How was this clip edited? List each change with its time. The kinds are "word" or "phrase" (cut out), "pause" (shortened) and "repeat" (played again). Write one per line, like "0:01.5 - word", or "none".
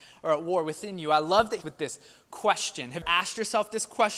0:01.6 - phrase
0:03.0 - phrase